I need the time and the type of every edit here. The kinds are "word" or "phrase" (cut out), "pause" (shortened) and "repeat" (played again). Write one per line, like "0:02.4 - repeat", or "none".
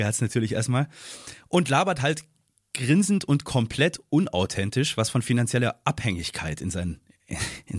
none